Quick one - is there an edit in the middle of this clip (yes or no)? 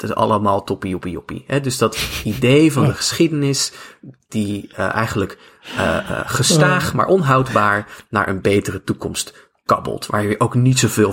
no